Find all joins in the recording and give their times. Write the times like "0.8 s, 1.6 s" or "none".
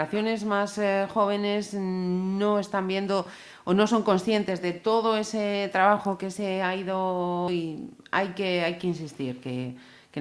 7.5 s